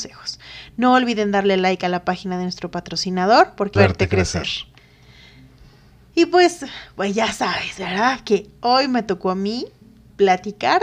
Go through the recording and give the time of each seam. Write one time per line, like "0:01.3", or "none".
0:03.8